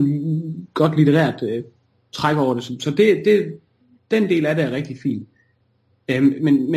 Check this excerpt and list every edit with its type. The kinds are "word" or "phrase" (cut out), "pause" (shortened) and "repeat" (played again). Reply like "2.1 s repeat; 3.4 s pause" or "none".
none